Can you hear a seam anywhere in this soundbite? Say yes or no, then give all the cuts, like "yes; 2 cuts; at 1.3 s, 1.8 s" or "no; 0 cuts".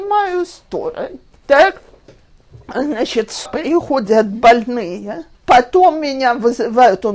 yes; 3 cuts; at 1.3 s, 3.5 s, 5.3 s